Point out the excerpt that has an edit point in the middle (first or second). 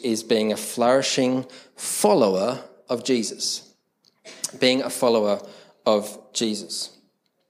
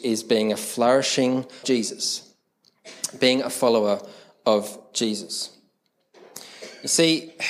second